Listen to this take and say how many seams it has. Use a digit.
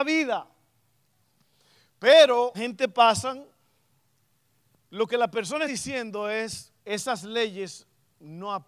3